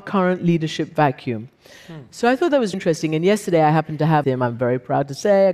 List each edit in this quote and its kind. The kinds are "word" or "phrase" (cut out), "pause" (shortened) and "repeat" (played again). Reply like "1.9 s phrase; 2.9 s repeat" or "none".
2.7 s word; 4.2 s phrase